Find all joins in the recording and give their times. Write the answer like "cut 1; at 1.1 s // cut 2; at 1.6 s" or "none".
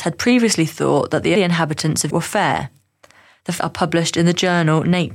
cut 1; at 1.4 s // cut 2; at 2.1 s // cut 3; at 3.6 s